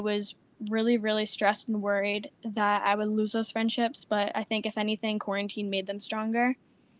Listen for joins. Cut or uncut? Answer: cut